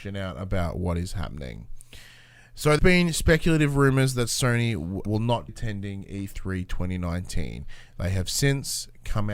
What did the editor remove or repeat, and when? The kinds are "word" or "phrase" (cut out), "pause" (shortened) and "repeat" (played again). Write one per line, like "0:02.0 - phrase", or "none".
0:02.8 - word
0:05.1 - word
0:05.5 - word